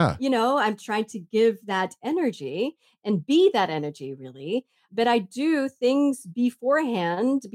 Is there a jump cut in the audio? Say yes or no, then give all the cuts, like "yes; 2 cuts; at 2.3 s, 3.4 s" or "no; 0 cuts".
no; 0 cuts